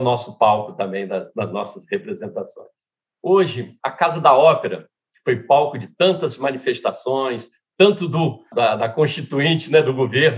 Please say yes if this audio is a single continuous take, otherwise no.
yes